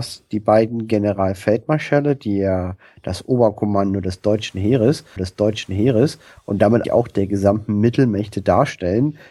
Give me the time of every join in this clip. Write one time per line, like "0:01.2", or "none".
0:05.2
0:06.8